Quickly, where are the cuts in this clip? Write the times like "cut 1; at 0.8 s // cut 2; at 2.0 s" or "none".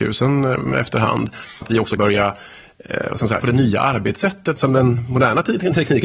cut 1; at 1.6 s // cut 2; at 2.0 s // cut 3; at 3.4 s // cut 4; at 4.6 s